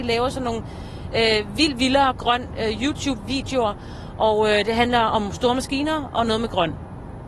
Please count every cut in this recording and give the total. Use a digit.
0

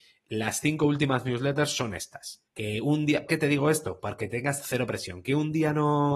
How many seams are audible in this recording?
2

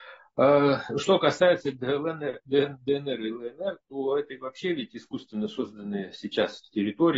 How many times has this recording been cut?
0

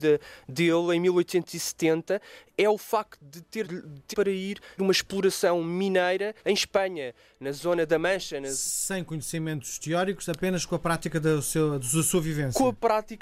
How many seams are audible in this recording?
4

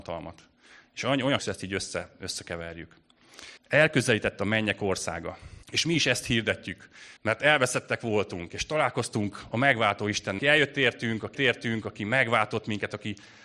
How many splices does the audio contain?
6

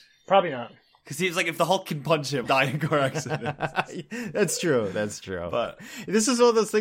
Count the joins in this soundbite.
1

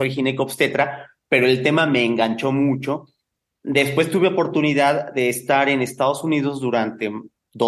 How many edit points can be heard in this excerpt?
0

